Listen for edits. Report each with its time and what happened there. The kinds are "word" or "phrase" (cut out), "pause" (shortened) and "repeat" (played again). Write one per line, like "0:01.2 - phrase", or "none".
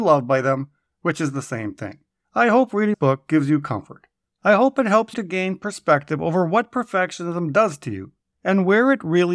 0:02.9 - word
0:05.1 - word